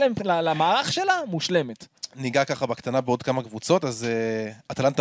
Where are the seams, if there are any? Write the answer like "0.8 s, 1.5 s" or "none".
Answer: none